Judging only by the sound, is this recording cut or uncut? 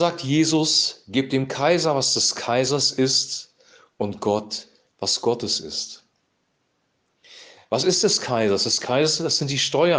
uncut